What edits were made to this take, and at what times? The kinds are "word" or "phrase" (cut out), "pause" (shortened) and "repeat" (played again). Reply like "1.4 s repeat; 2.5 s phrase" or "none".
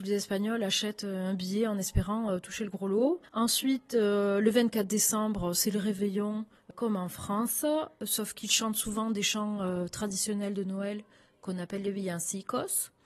none